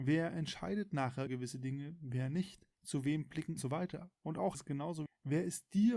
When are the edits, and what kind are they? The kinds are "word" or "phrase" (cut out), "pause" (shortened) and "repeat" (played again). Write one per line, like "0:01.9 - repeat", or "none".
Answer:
0:01.3 - word
0:02.7 - pause
0:03.6 - phrase
0:04.5 - phrase
0:05.1 - word